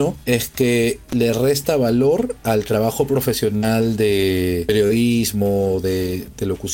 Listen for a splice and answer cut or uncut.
uncut